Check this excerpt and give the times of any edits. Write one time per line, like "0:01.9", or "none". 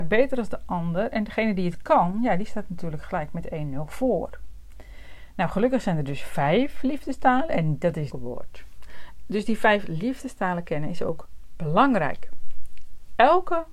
0:08.1